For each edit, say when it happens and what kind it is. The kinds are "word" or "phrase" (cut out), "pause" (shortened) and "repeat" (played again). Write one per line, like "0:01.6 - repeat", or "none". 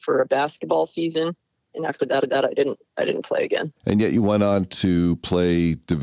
0:02.2 - repeat
0:03.8 - pause